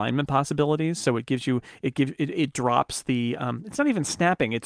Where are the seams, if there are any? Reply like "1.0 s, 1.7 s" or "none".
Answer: none